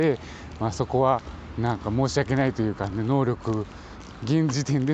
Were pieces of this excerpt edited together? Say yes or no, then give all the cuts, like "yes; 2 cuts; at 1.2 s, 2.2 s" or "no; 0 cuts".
no; 0 cuts